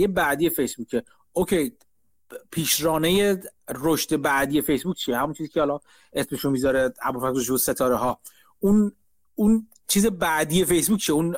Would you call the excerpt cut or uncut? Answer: uncut